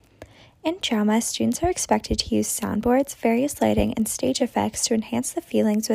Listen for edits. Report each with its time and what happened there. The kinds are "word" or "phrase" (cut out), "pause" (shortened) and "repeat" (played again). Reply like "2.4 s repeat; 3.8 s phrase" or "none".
none